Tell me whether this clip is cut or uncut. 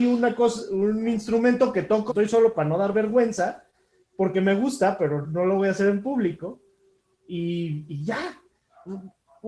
cut